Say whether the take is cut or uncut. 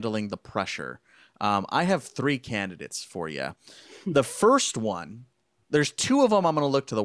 uncut